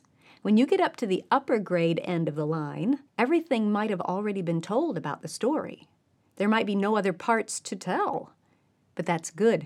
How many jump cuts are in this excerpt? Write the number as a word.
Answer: one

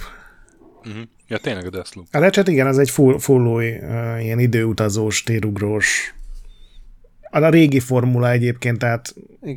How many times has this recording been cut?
one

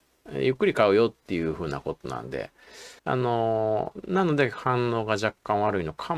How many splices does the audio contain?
one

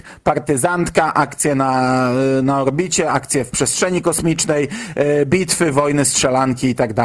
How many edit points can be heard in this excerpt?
zero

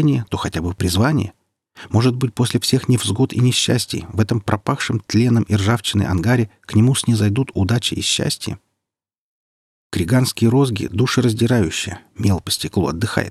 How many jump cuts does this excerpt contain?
zero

